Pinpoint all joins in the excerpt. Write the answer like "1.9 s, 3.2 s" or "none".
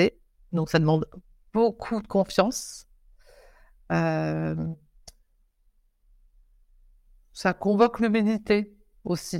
none